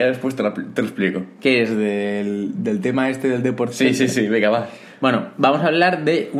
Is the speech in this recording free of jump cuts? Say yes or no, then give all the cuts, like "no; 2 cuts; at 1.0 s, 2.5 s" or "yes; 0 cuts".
yes; 0 cuts